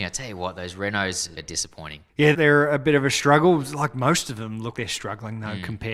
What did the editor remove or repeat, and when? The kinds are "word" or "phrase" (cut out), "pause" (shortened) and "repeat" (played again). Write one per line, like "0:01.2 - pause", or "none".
0:01.4 - word
0:02.3 - word
0:04.7 - word